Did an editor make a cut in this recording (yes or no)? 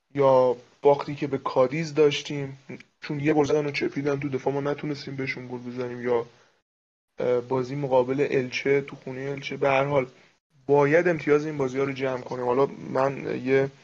no